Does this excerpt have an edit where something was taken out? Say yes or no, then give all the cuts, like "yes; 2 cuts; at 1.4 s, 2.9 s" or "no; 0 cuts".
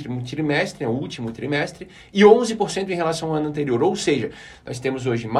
no; 0 cuts